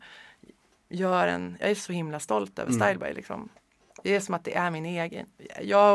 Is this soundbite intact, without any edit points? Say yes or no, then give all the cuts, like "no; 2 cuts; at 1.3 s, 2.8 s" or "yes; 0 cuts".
yes; 0 cuts